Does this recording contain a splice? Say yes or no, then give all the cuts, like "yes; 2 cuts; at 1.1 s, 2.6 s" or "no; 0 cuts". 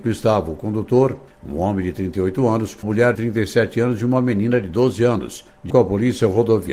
yes; 3 cuts; at 2.8 s, 3.2 s, 5.7 s